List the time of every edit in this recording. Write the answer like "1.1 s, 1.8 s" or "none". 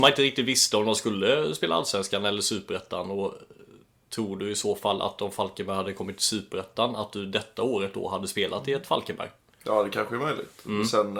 none